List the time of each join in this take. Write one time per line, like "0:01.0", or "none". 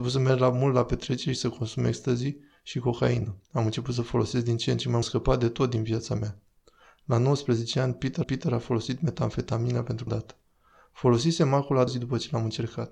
0:05.0
0:08.2
0:10.1
0:11.9